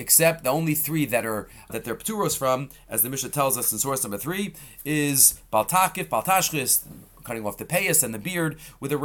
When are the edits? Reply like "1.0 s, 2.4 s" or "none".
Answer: 1.7 s

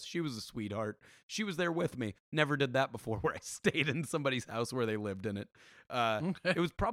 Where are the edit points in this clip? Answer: none

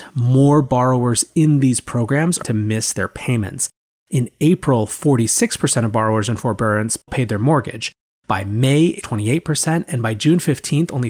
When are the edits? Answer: 2.4 s, 7.1 s, 9.0 s

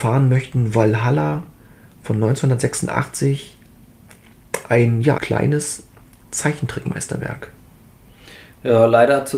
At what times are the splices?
5.2 s

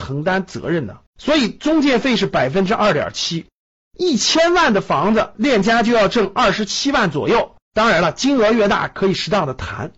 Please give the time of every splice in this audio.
1.1 s, 7.6 s

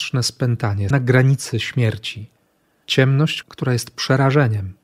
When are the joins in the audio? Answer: 0.9 s, 3.4 s

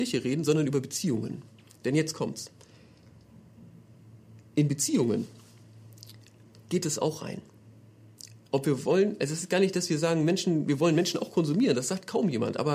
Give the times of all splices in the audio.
none

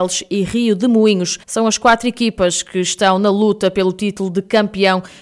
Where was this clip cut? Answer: 1.4 s

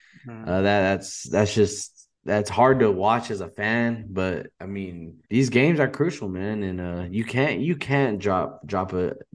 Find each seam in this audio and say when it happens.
2.1 s, 4.5 s, 5.2 s

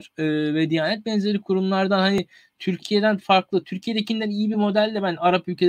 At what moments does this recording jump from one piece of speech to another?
none

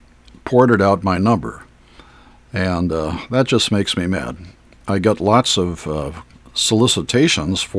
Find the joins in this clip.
none

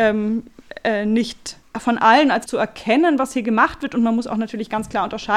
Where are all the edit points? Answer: 1.6 s, 2.5 s

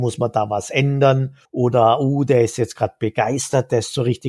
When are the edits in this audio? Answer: 1.5 s

